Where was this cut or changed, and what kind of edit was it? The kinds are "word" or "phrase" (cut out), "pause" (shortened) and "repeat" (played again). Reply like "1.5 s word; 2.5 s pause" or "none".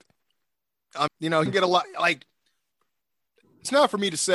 1.1 s word; 1.5 s word